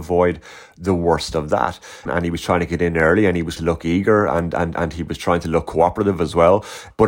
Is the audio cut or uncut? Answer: cut